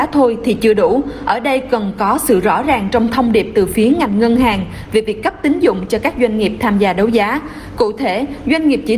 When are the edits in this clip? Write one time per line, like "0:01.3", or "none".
none